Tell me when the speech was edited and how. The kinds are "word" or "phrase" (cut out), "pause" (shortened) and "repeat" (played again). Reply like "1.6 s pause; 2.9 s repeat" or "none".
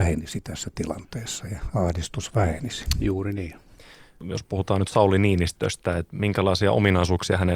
none